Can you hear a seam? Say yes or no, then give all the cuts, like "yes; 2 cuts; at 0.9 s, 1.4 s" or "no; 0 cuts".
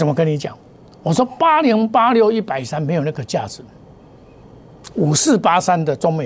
no; 0 cuts